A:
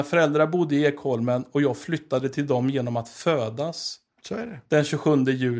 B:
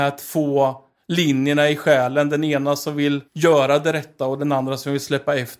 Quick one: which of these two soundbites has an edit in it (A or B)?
B